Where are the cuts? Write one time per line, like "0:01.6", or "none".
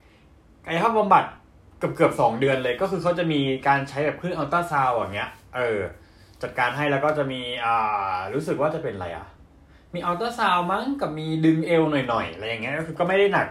none

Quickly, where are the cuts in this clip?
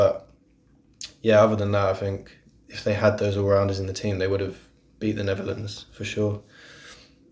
none

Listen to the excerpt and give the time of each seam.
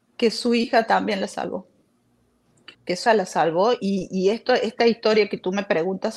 0:02.7
0:03.1

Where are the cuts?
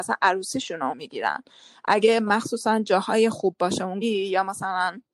0:00.9
0:04.0

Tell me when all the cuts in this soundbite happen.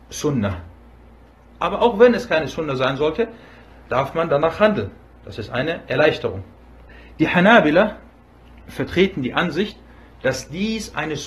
none

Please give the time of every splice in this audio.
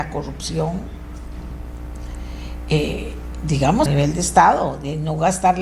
0:03.9

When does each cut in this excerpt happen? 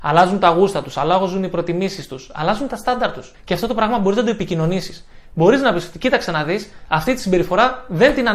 0:03.3

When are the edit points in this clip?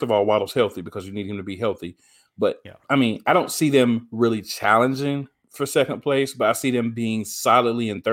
none

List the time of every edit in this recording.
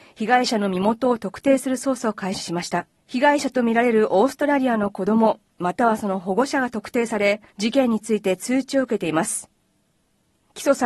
0:03.0
0:07.5

